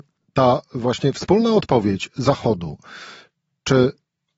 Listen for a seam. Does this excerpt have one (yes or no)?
no